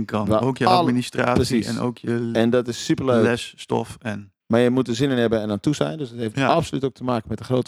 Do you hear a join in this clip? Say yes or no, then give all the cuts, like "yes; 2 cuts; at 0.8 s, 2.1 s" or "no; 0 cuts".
yes; 1 cut; at 4.4 s